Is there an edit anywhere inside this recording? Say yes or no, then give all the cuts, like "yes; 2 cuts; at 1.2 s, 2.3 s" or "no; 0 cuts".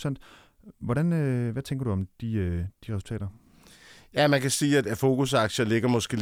no; 0 cuts